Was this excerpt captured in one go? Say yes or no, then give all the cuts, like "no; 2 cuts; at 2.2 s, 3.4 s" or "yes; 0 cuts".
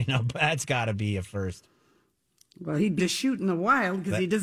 no; 1 cut; at 3.0 s